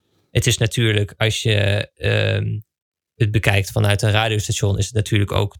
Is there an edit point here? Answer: no; 0 cuts

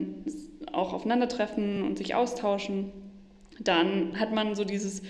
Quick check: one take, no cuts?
yes; 0 cuts

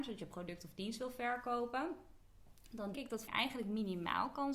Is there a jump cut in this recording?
yes; 2 cuts; at 2.9 s, 3.3 s

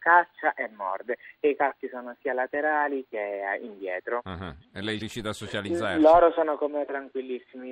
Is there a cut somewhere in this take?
yes; 1 cut; at 5.0 s

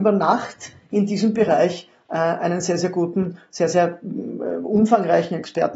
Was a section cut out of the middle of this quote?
no; 0 cuts

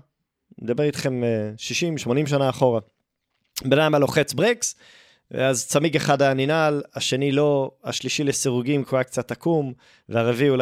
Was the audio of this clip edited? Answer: no; 0 cuts

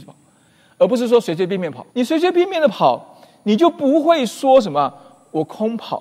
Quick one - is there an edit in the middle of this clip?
yes; 1 cut; at 1.9 s

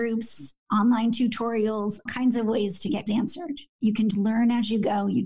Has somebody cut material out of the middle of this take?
yes; 3 cuts; at 2.1 s, 3.1 s, 4.1 s

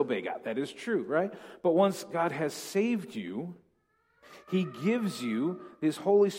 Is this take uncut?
yes; 0 cuts

